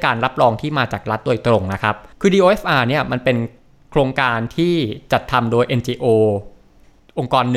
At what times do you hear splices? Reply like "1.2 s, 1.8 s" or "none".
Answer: 2.1 s